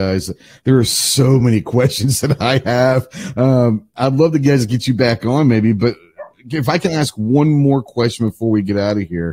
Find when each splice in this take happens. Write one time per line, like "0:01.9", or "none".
none